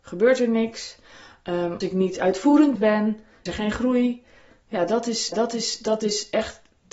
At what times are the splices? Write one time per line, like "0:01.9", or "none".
0:01.8
0:02.8
0:03.5
0:05.3